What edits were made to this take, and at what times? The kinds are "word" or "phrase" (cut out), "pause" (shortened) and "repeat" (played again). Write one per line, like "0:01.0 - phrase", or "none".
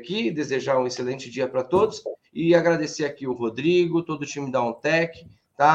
none